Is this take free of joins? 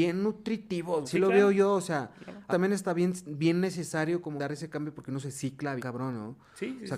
no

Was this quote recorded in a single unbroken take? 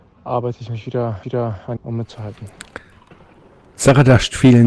no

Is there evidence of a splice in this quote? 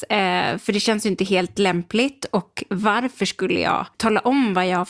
no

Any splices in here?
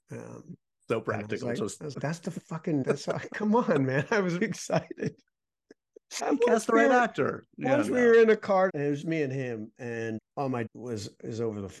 yes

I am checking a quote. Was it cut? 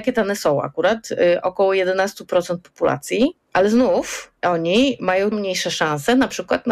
yes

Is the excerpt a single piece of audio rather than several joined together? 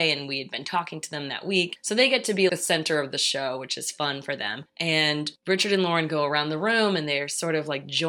no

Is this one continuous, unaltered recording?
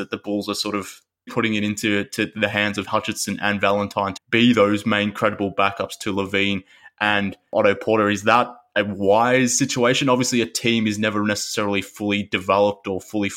no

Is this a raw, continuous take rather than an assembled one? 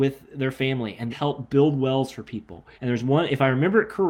no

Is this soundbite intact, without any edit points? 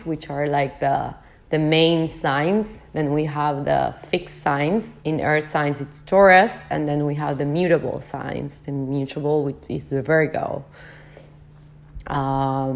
no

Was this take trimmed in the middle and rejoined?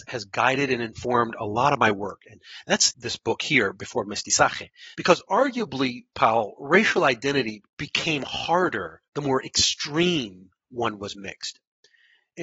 yes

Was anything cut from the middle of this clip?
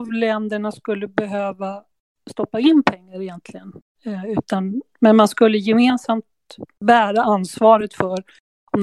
no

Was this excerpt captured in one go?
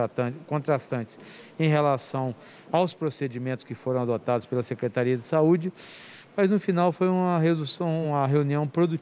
yes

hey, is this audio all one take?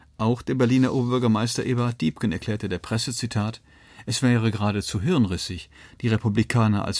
yes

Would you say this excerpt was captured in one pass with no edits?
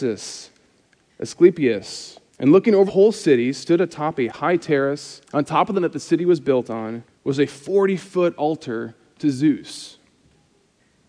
no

